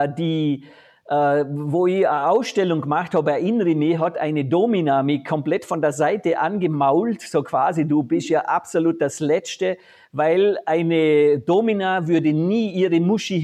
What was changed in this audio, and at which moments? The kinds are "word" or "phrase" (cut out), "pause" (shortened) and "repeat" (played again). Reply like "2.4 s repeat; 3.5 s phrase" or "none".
none

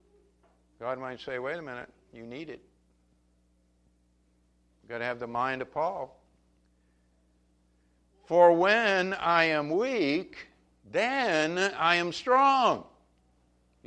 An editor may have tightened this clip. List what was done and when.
none

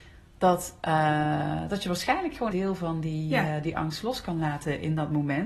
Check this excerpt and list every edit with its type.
2.5 s phrase

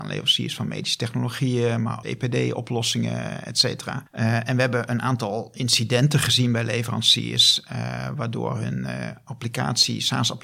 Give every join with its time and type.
2.0 s phrase

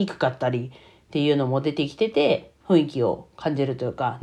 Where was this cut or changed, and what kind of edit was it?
2.6 s pause

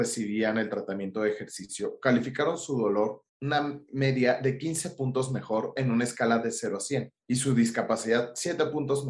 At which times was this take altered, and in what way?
3.3 s pause; 7.2 s pause

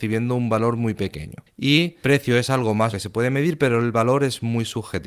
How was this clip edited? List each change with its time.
2.0 s word; 2.9 s word

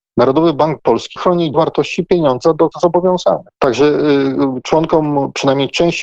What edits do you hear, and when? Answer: 1.2 s word; 1.5 s word; 2.7 s phrase; 3.5 s pause

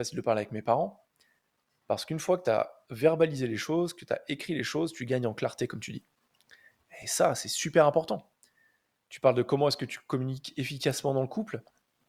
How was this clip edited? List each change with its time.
none

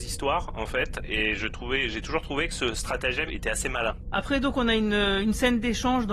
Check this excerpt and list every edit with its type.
3.3 s word

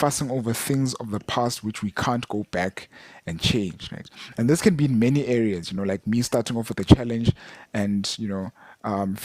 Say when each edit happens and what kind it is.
none

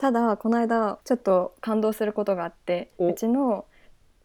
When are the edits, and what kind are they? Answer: 1.0 s pause

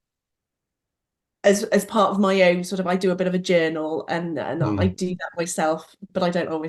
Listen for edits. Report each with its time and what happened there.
none

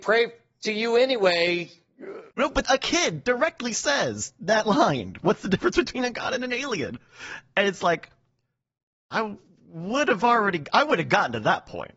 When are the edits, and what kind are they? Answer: 2.3 s pause; 2.6 s word

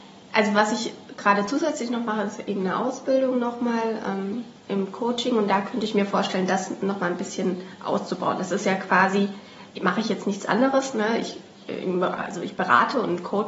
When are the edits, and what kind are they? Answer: 9.7 s pause

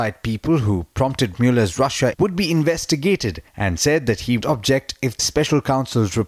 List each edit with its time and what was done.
1.3 s word; 2.1 s word; 3.5 s pause; 4.4 s word; 5.2 s word

